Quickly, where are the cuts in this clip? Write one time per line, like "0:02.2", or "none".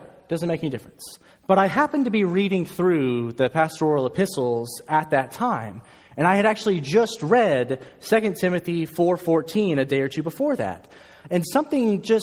0:01.3